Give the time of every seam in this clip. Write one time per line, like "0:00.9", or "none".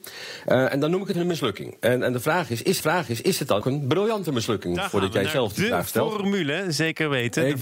0:01.1
0:02.8
0:03.6